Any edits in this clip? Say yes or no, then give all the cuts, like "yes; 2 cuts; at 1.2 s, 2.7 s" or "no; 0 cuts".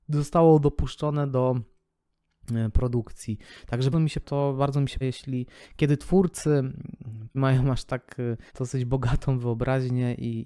yes; 5 cuts; at 3.9 s, 4.2 s, 5.0 s, 7.3 s, 8.5 s